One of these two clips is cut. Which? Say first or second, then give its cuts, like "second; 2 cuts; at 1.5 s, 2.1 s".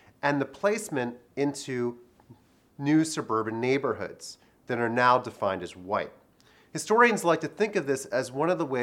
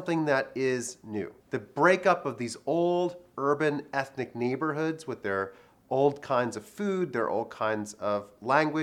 second; 1 cut; at 1.4 s